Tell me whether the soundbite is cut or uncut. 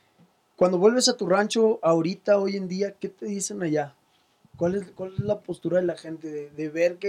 uncut